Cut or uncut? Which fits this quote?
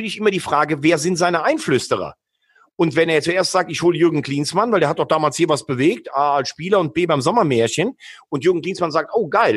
uncut